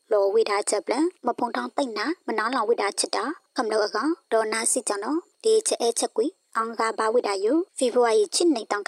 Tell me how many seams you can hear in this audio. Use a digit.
2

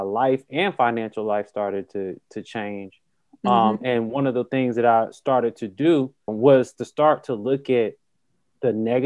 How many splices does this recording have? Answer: 1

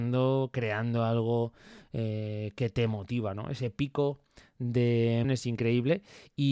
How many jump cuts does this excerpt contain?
1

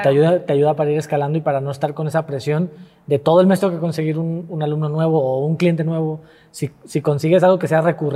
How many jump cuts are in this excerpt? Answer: 0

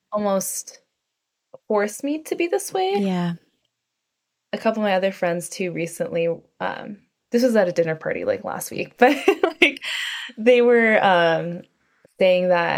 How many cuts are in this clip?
0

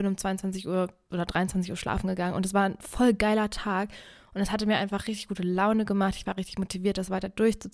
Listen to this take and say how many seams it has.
0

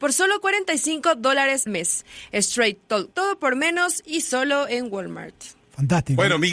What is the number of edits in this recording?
3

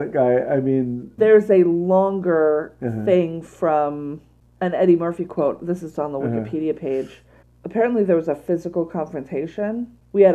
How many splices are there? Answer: 1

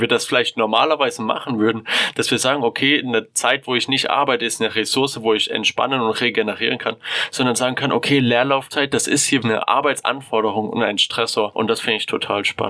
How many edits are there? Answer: 1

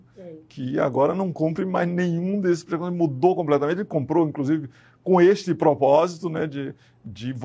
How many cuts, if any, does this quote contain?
0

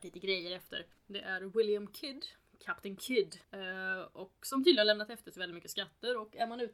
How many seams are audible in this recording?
2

